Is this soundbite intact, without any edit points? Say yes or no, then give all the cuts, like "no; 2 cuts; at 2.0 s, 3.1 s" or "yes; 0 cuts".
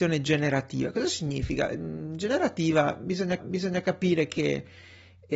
no; 1 cut; at 3.4 s